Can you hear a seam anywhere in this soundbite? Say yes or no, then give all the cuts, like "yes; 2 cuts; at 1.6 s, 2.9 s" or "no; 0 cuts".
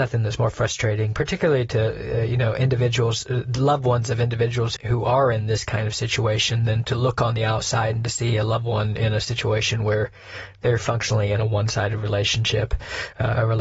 yes; 1 cut; at 4.8 s